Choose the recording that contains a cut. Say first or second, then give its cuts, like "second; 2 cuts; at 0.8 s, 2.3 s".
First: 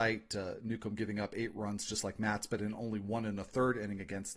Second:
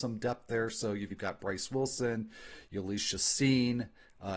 second; 1 cut; at 1.1 s